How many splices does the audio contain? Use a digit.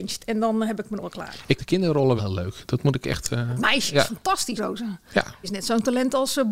5